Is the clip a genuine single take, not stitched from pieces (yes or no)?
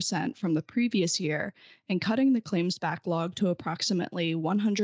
yes